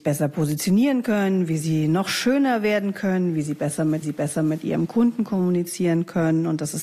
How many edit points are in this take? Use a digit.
1